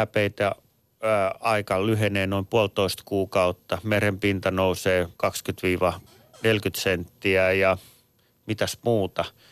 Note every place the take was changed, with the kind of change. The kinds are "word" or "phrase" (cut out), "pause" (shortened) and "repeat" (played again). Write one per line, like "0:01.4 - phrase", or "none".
0:05.1 - pause